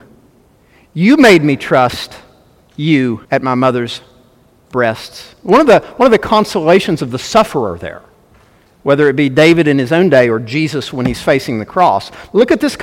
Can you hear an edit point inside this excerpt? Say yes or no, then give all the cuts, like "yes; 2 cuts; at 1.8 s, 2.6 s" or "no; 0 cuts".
yes; 1 cut; at 3.2 s